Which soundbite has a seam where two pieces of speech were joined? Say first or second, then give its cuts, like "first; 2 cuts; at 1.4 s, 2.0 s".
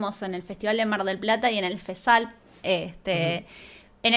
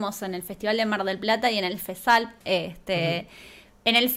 second; 1 cut; at 2.4 s